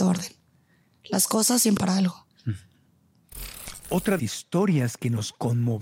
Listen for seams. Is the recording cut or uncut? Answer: cut